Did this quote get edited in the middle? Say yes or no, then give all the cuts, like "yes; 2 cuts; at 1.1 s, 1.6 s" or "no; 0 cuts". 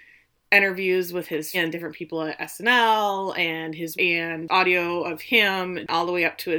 yes; 2 cuts; at 1.5 s, 3.9 s